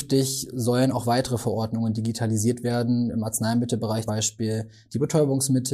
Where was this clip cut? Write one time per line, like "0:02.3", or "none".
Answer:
0:04.1

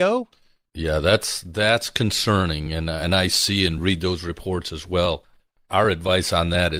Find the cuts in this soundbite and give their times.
none

